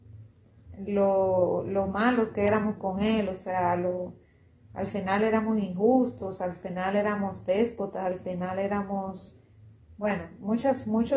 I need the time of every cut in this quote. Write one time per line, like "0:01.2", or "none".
none

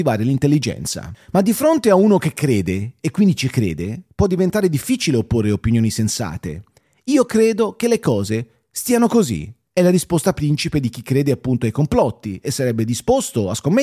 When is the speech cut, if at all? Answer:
none

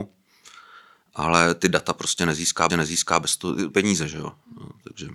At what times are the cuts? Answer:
0:02.7
0:03.7

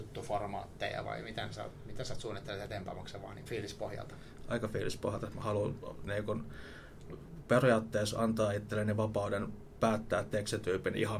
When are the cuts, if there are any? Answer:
0:03.5

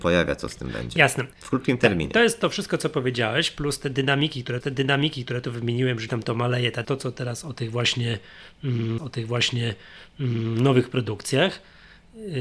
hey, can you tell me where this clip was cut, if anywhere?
0:01.3
0:04.6
0:06.1
0:06.8
0:09.0

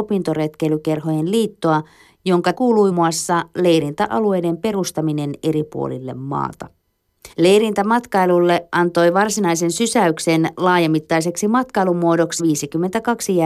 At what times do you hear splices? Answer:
0:02.5
0:02.9
0:07.3
0:12.4

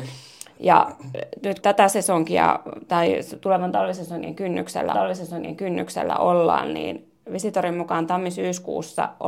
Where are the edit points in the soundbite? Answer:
0:01.6
0:04.9

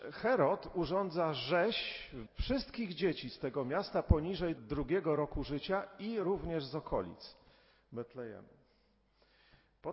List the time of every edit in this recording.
0:02.3
0:04.6

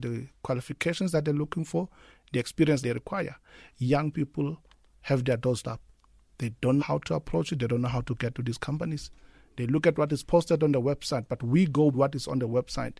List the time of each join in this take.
0:02.8
0:05.6
0:06.8
0:11.9

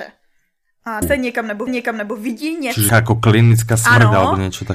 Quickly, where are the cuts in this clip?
0:01.0
0:01.7
0:02.9

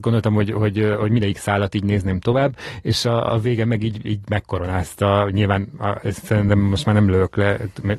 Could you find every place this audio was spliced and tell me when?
0:03.3

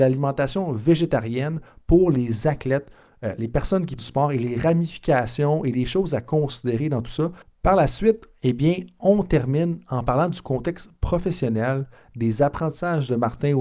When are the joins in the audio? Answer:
0:04.0

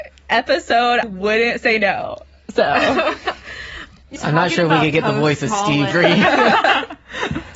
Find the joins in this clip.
0:01.0
0:04.2
0:05.9

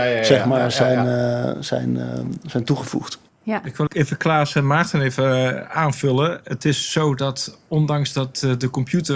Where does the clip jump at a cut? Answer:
0:03.3
0:03.9

